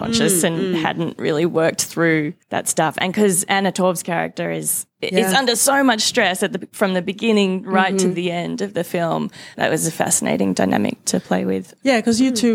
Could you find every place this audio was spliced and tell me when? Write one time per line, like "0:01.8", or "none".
0:02.4
0:04.9